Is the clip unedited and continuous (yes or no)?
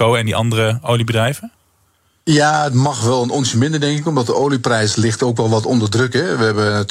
yes